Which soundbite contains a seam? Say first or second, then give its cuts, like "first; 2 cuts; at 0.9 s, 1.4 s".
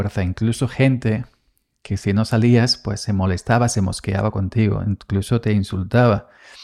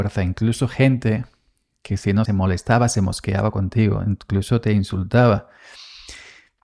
second; 1 cut; at 2.3 s